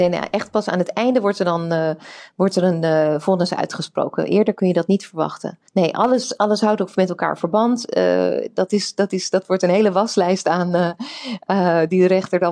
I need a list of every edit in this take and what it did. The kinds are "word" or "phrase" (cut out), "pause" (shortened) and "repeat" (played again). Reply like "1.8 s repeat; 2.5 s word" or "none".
5.7 s pause